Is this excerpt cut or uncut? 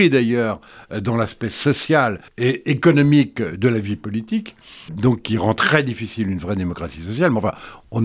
cut